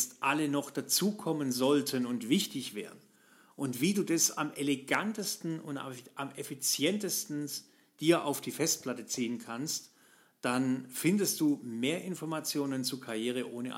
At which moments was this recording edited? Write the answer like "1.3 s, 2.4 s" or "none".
none